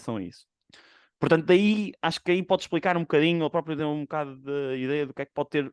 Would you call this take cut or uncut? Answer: uncut